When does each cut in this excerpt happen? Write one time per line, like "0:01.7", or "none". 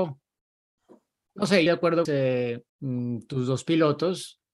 0:01.7
0:02.0
0:02.7